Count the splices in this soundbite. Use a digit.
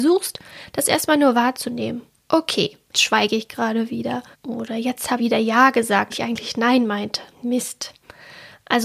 5